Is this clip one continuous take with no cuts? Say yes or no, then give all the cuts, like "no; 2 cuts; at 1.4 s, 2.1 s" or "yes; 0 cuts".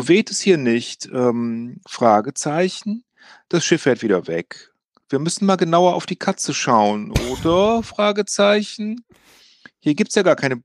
yes; 0 cuts